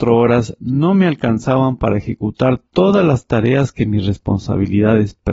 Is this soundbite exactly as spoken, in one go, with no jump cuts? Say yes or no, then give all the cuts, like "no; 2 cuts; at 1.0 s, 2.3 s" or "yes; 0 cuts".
yes; 0 cuts